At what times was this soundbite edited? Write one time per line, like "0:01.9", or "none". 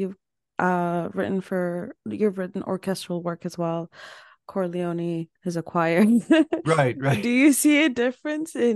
0:02.0
0:05.4